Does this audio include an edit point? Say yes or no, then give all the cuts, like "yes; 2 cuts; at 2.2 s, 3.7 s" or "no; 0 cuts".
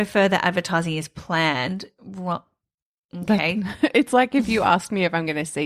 no; 0 cuts